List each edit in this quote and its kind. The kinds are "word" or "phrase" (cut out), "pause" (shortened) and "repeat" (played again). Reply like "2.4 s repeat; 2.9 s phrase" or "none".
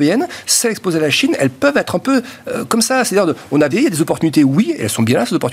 3.7 s word